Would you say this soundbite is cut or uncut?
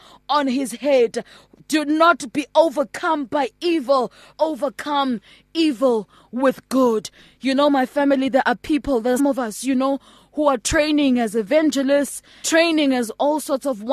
cut